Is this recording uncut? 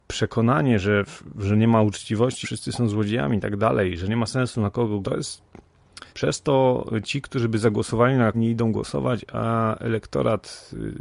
no; 4 cuts; at 2.4 s, 5.0 s, 6.1 s, 8.3 s

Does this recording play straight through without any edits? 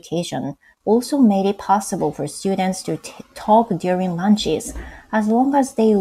yes; 0 cuts

